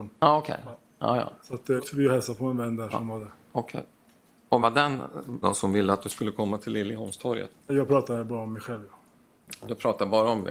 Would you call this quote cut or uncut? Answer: cut